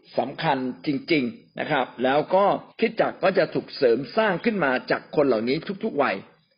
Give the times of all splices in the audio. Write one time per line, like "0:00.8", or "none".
0:02.7